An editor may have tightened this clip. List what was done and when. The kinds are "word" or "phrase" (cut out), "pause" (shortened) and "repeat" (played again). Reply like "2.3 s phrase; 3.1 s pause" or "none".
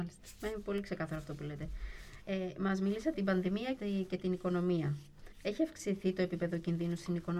2.2 s pause; 3.1 s word; 3.8 s word; 5.3 s pause